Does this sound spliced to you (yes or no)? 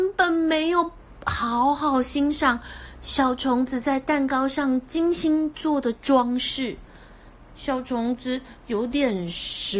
no